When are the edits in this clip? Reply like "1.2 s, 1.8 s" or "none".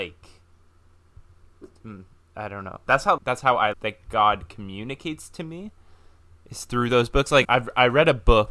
2.9 s, 3.2 s, 3.7 s, 7.4 s